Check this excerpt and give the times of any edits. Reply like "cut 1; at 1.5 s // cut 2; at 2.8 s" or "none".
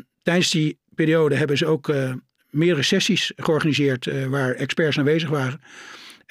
none